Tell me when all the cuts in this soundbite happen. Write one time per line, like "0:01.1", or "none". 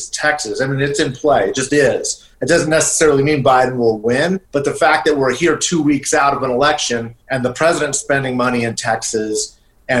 0:02.3
0:04.4
0:07.2